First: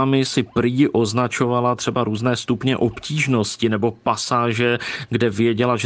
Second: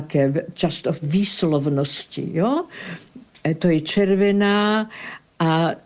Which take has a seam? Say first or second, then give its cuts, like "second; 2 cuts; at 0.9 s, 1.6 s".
second; 1 cut; at 1.0 s